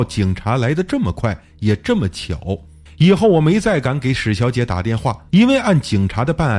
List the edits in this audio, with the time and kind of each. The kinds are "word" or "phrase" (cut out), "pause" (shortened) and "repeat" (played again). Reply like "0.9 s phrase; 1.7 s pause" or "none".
2.9 s pause; 5.3 s pause

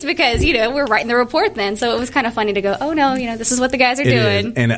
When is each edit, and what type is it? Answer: none

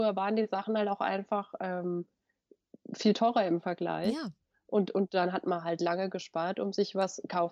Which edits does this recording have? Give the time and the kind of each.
none

